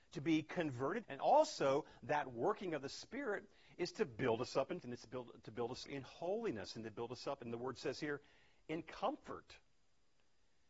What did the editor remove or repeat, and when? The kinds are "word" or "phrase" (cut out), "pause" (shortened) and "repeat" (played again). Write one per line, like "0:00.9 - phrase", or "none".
0:01.0 - word
0:04.8 - word
0:05.8 - word